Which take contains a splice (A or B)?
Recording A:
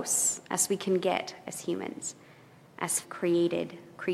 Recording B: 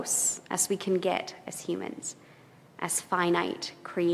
A